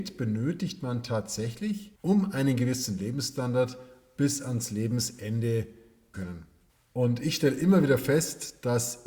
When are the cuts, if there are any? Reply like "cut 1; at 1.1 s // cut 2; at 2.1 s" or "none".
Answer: cut 1; at 2.0 s // cut 2; at 6.1 s